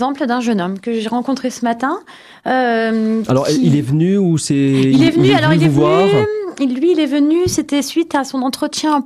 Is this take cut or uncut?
uncut